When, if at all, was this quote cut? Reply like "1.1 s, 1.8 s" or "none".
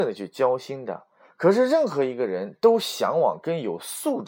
none